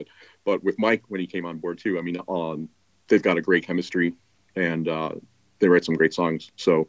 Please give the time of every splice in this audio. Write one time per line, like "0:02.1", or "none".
none